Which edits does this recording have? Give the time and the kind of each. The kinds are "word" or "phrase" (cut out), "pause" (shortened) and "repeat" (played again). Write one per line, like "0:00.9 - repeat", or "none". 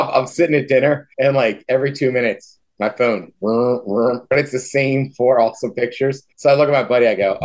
0:01.1 - pause
0:06.3 - pause